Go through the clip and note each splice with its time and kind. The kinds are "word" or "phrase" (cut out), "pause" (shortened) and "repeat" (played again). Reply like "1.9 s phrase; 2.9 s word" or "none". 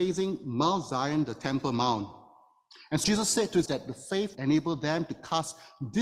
3.0 s word; 3.7 s word; 4.3 s word